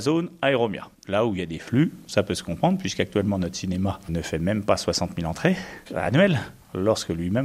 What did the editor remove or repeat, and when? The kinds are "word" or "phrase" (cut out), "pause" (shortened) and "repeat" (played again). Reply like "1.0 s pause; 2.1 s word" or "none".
none